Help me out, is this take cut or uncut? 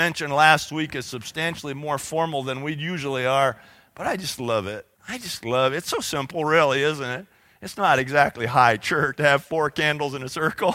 cut